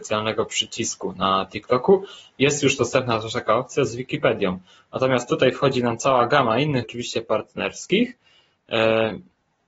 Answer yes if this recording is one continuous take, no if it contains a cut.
no